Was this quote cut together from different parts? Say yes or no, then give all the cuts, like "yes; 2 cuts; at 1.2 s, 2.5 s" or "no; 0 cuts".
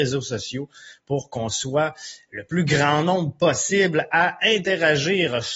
no; 0 cuts